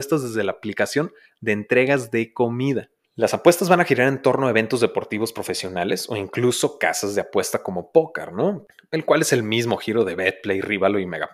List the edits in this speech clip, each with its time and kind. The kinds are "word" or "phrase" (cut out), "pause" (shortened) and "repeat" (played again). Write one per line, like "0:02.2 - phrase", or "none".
none

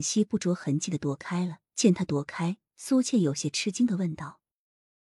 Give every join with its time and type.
0:01.7 - pause

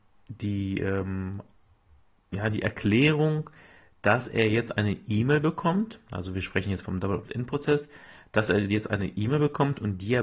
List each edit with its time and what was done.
none

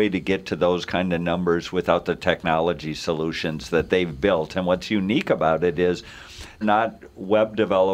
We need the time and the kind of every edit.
0:06.6 - word

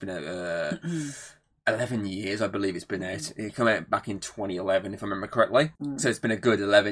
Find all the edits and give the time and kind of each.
0:05.8 - pause

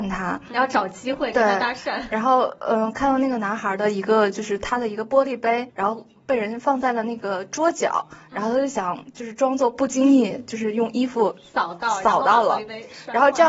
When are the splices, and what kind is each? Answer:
none

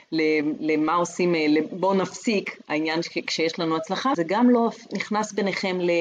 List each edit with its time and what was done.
0:04.1 - word

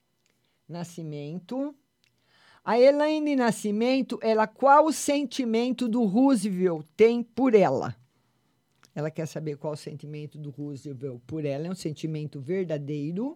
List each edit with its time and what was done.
none

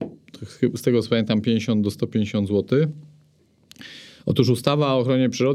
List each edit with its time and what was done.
none

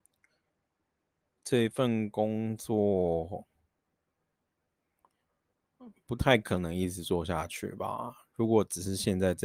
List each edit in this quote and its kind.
none

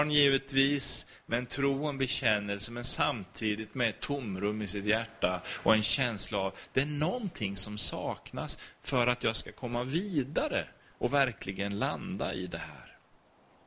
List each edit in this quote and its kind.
none

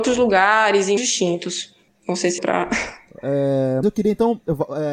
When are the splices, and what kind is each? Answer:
0:01.0 - word
0:02.4 - word
0:03.8 - word

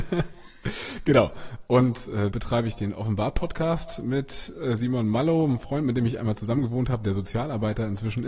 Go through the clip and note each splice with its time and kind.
0:02.3 - word

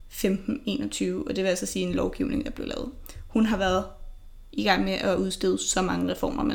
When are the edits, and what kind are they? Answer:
none

